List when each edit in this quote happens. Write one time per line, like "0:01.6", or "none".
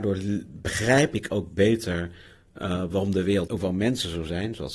0:03.5